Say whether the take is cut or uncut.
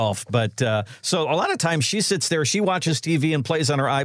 uncut